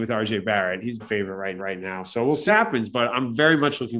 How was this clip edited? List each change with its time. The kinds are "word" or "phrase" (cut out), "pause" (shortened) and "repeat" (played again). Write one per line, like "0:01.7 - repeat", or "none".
0:01.0 - word
0:01.6 - repeat
0:02.5 - word